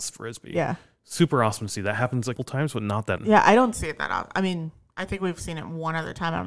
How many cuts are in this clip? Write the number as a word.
three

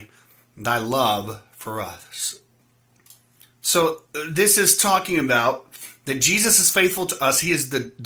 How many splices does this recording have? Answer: one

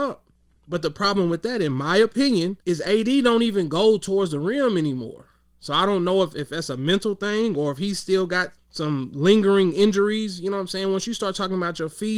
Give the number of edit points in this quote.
two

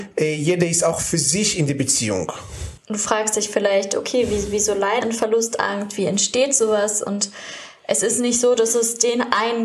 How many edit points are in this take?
one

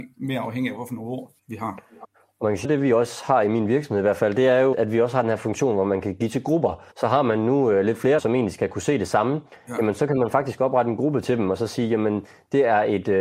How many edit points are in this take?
six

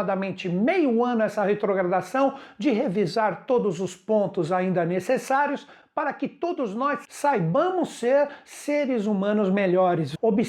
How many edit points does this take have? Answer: zero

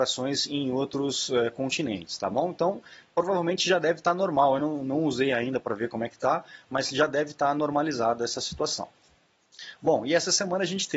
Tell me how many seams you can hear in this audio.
zero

